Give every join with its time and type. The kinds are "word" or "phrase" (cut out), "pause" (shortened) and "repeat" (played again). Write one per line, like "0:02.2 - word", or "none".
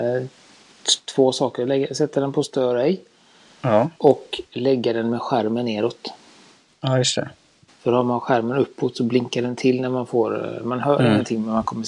none